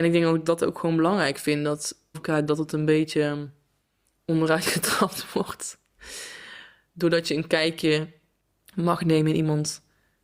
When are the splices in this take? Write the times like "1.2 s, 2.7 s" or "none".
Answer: 2.1 s, 2.5 s